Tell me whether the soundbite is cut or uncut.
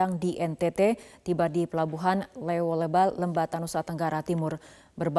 uncut